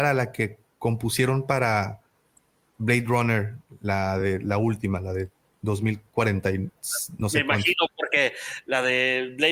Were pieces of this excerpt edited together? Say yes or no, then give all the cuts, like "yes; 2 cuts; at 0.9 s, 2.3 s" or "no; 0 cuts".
no; 0 cuts